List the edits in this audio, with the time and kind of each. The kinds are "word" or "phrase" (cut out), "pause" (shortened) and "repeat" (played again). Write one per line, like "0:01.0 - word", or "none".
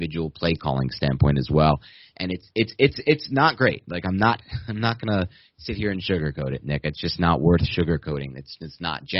none